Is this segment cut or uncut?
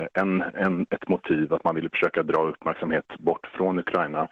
uncut